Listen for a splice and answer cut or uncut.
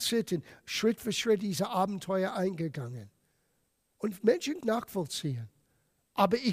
cut